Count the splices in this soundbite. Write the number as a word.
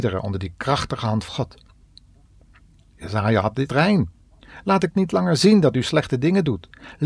two